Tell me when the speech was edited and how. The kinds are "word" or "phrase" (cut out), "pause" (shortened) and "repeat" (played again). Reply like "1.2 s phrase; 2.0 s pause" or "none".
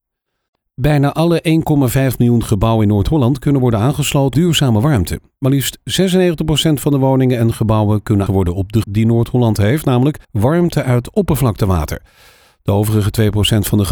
4.3 s word; 8.3 s word; 8.8 s phrase; 10.2 s pause